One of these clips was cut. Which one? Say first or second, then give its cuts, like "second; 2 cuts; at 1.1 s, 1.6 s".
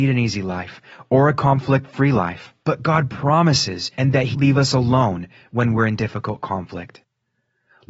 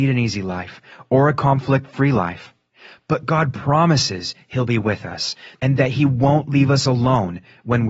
first; 3 cuts; at 2.6 s, 4.0 s, 4.3 s